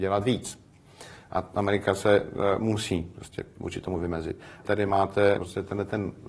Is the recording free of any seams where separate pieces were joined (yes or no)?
no